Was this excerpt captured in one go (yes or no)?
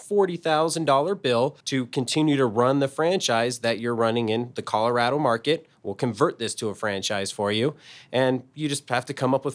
no